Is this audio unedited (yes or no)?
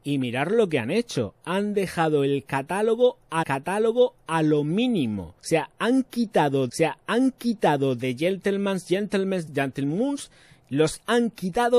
no